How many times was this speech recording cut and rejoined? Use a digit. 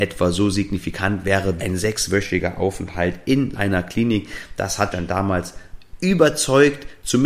3